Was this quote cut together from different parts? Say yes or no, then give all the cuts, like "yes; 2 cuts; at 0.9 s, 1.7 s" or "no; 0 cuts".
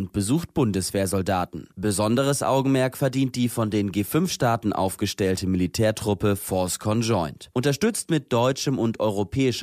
no; 0 cuts